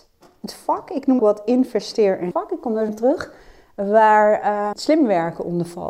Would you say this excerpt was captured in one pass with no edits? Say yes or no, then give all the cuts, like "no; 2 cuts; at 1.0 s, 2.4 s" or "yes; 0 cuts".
no; 4 cuts; at 1.2 s, 2.3 s, 2.9 s, 4.7 s